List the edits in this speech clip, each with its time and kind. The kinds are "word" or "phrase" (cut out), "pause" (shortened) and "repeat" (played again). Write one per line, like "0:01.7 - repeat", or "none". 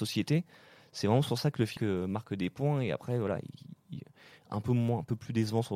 0:01.8 - word

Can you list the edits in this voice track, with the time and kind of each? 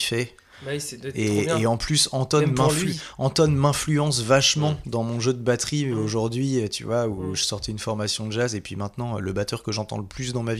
none

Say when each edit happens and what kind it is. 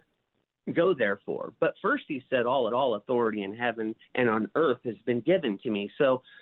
0:02.7 - repeat
0:04.0 - pause

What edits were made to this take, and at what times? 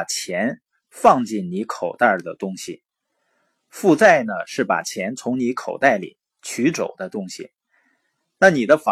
none

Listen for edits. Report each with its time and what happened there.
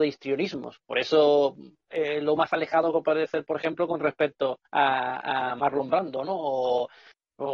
0:04.6 - pause

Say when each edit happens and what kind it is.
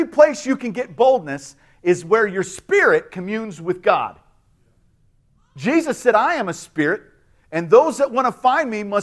none

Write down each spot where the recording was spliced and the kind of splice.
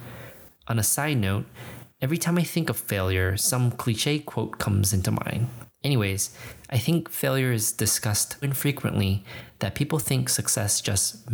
0:08.4 - word

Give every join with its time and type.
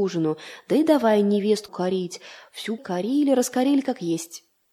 0:01.7 - word
0:02.8 - word

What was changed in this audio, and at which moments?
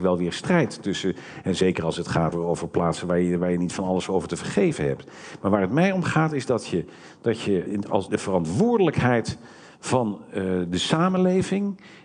0:02.3 - word
0:07.7 - word
0:08.1 - word

